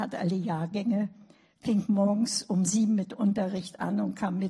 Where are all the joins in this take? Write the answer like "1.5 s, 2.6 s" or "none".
none